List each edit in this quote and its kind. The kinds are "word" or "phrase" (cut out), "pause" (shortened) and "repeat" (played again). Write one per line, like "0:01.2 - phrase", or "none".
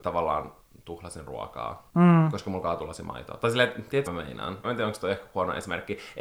0:04.1 - word
0:04.6 - word